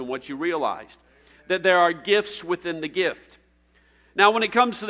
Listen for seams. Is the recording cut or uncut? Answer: uncut